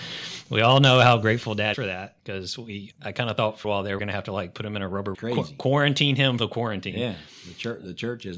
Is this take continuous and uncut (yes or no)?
no